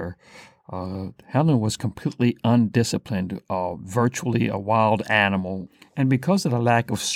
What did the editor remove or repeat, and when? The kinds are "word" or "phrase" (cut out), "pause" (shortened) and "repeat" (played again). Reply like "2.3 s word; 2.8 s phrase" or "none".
none

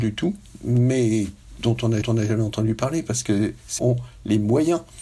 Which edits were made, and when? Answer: 2.0 s repeat; 3.8 s word

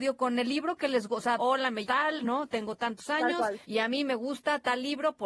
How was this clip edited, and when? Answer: 1.4 s phrase; 1.8 s word; 3.6 s pause

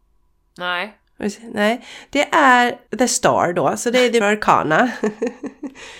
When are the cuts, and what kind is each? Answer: 2.9 s pause; 4.2 s word

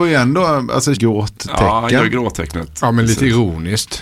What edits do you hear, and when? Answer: 0.9 s phrase

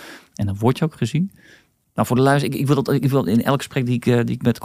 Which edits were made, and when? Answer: none

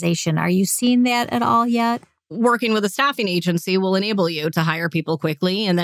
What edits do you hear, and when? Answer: none

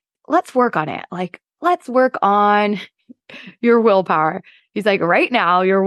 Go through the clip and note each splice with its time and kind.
none

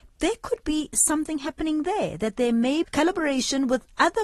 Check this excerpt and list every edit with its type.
2.8 s word

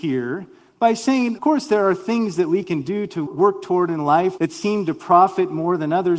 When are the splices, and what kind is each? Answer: 1.4 s word; 3.3 s word; 4.4 s word

